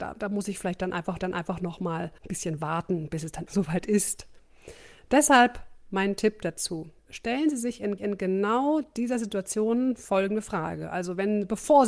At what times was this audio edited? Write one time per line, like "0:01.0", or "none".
0:01.2
0:02.2
0:03.5
0:07.0
0:08.0